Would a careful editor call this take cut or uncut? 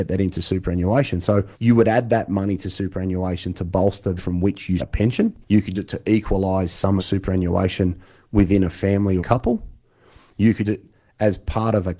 cut